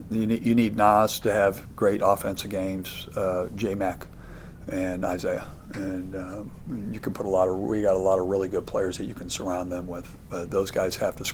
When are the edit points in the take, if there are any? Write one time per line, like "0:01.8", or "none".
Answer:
none